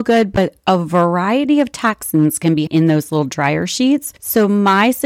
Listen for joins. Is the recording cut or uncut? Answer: cut